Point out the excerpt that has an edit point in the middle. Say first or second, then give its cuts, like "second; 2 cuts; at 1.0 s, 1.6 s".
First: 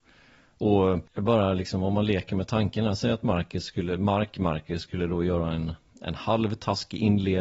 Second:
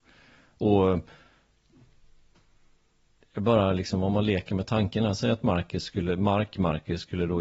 first; 1 cut; at 1.1 s